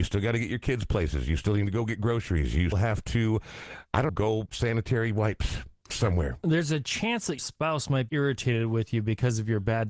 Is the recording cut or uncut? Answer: cut